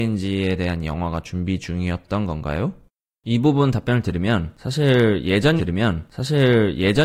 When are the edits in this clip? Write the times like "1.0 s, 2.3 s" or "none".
5.6 s